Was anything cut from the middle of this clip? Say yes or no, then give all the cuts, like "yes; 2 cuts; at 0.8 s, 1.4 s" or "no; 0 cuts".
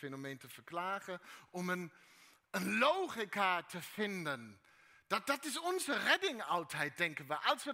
no; 0 cuts